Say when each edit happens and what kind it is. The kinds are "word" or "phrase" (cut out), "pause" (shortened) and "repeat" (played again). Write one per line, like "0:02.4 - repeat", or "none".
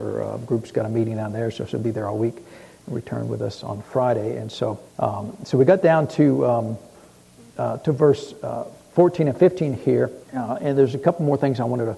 0:04.9 - pause
0:07.3 - pause
0:10.2 - pause